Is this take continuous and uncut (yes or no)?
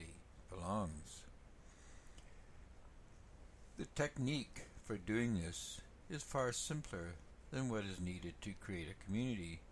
yes